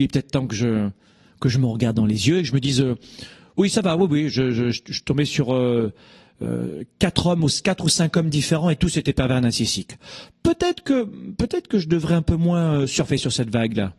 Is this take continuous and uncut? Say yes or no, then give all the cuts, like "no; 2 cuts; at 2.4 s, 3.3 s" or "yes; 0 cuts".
yes; 0 cuts